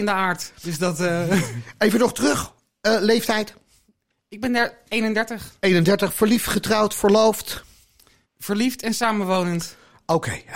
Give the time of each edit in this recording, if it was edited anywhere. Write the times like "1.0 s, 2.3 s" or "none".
none